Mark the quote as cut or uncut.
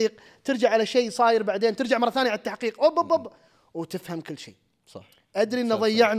uncut